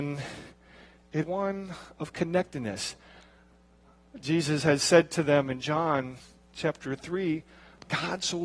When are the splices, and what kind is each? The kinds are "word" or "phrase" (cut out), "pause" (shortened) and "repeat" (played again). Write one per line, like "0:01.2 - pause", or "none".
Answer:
0:01.2 - word